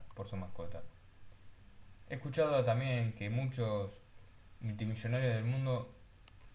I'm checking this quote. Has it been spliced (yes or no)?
no